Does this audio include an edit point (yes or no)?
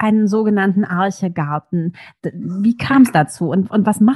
no